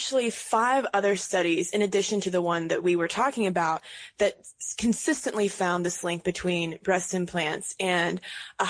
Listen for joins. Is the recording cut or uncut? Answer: uncut